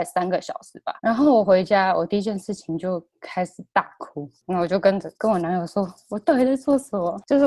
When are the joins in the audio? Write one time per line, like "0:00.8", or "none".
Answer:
0:01.0
0:05.1